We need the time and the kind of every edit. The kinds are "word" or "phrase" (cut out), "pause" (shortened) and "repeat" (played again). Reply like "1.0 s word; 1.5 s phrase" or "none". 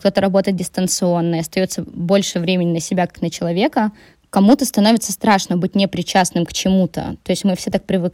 none